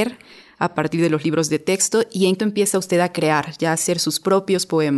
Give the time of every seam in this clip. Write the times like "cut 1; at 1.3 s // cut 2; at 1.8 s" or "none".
cut 1; at 2.4 s